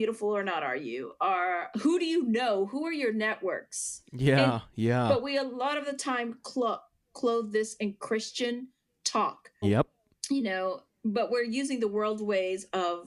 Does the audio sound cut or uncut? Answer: cut